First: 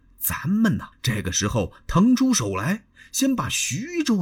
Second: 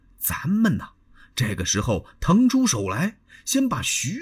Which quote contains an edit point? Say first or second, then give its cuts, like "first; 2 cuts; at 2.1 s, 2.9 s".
first; 1 cut; at 0.9 s